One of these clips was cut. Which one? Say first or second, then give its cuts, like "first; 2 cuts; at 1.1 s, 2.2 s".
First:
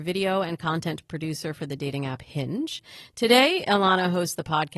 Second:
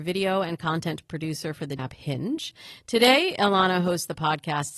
second; 1 cut; at 1.8 s